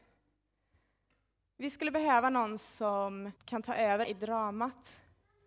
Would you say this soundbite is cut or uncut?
cut